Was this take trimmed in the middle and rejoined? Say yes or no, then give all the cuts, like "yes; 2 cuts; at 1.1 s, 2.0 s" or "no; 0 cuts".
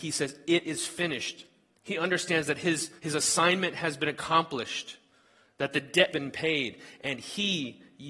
yes; 3 cuts; at 1.7 s, 3.0 s, 6.1 s